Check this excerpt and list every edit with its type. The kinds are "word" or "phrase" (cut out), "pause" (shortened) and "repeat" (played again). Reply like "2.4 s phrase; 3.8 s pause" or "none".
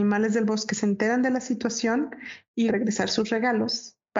2.7 s word